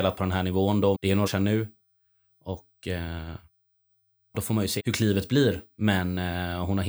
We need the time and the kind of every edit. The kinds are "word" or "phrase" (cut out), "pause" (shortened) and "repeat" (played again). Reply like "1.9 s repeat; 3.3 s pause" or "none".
0.9 s word; 1.3 s word; 4.3 s word; 4.8 s word

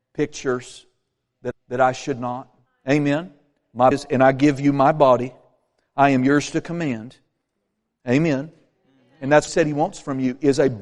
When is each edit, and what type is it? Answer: 1.5 s repeat; 2.7 s pause; 3.9 s word; 9.5 s phrase

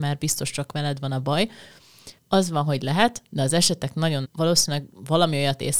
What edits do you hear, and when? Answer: 2.2 s pause; 4.2 s phrase

